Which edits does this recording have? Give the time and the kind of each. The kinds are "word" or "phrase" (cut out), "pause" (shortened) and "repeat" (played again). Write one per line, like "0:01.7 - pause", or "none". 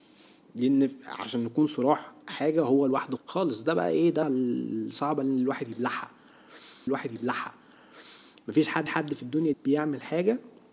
0:02.2 - phrase
0:03.2 - word
0:04.2 - word
0:06.9 - repeat
0:08.9 - repeat
0:09.5 - word